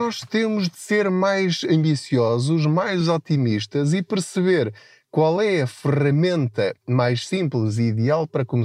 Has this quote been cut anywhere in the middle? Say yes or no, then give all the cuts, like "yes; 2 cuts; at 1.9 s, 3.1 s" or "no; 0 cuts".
no; 0 cuts